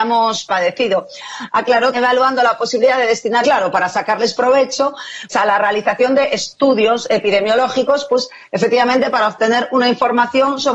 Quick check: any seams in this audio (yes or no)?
yes